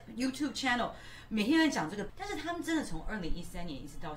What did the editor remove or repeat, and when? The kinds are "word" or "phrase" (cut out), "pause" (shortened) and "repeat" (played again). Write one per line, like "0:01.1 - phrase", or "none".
0:02.1 - word